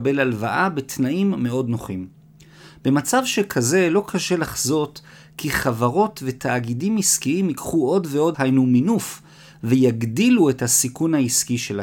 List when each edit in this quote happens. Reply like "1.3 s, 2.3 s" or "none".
8.3 s